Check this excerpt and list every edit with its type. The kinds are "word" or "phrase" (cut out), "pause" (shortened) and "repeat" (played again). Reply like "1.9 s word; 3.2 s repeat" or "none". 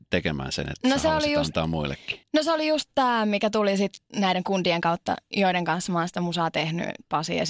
none